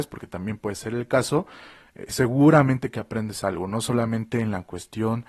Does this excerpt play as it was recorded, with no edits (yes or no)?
yes